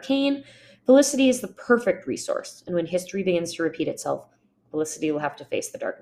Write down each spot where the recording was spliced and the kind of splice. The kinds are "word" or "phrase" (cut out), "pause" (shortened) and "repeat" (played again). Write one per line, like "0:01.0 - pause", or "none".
none